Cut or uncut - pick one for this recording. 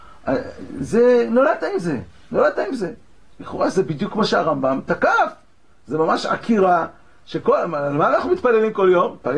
uncut